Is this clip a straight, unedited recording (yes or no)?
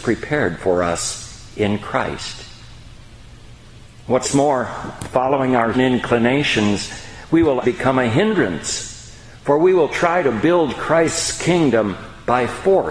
no